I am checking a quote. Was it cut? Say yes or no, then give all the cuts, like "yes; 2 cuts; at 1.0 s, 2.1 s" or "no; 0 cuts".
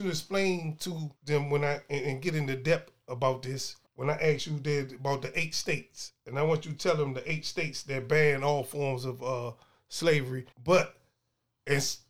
yes; 3 cuts; at 1.2 s, 3.9 s, 10.5 s